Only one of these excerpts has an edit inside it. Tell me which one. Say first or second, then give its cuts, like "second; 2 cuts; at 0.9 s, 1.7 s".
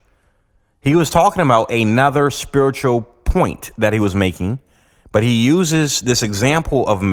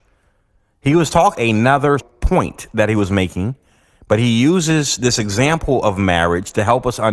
second; 2 cuts; at 1.3 s, 2.0 s